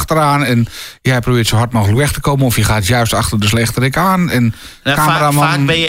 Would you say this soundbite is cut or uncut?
uncut